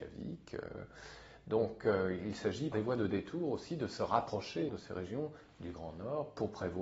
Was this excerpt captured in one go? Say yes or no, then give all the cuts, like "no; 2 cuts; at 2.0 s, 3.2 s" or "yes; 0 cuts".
no; 2 cuts; at 2.7 s, 4.7 s